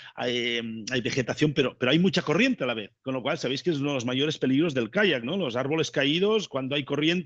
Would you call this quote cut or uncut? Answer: cut